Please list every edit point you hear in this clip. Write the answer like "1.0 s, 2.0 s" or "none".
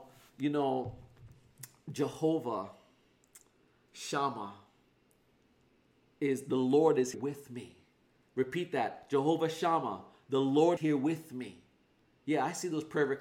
7.1 s, 10.8 s